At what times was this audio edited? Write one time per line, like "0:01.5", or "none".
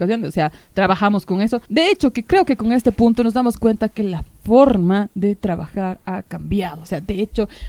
0:01.7